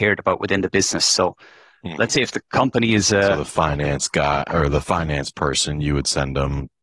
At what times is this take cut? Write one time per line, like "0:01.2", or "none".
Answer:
none